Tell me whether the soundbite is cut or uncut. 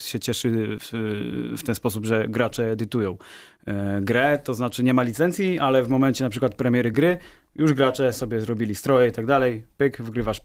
uncut